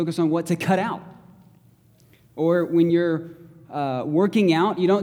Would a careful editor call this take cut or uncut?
uncut